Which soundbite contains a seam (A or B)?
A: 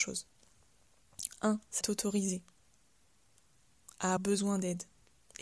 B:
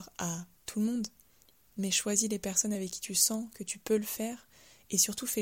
A